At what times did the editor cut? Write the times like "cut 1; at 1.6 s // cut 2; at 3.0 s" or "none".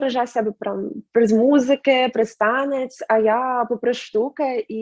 none